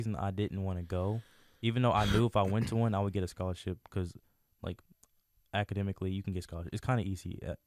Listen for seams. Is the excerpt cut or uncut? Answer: uncut